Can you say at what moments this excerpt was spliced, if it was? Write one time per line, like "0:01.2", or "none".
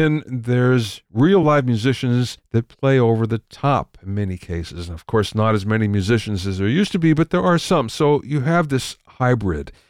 none